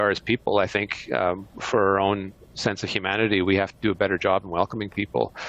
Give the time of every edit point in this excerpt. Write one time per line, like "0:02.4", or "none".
none